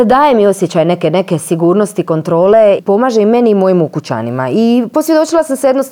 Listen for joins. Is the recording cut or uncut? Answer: cut